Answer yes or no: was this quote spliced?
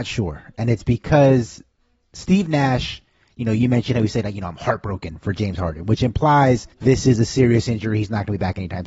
yes